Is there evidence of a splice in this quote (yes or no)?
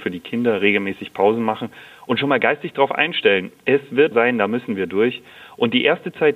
yes